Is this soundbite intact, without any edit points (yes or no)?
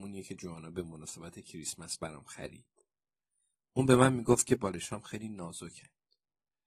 yes